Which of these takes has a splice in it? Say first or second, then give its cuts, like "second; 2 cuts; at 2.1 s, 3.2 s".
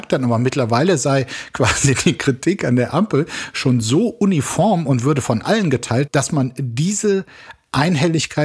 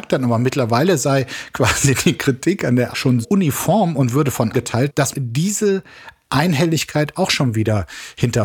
second; 4 cuts; at 2.9 s, 3.2 s, 4.5 s, 5.1 s